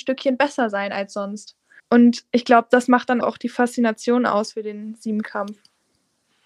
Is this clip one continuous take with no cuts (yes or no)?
no